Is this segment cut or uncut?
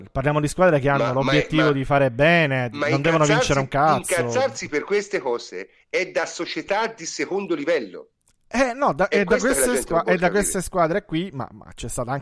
uncut